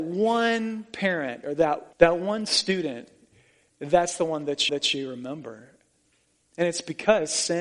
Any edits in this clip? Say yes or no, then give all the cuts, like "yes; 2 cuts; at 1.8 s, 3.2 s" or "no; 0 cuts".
yes; 2 cuts; at 1.9 s, 4.7 s